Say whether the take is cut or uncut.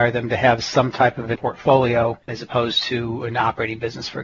cut